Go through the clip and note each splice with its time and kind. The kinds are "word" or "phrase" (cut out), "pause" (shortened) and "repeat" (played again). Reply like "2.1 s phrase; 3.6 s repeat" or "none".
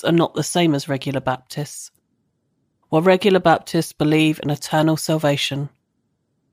none